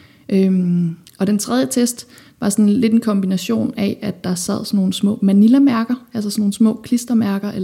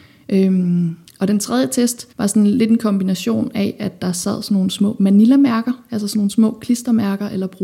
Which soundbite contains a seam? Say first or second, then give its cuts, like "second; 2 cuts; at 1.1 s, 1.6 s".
second; 1 cut; at 2.1 s